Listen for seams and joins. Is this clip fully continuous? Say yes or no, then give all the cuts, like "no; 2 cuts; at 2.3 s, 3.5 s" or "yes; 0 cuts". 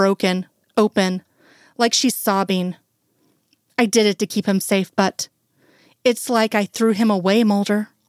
yes; 0 cuts